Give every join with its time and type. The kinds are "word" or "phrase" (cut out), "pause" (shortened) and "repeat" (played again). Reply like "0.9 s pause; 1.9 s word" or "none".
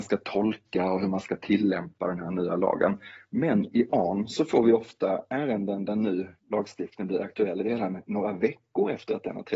6.4 s pause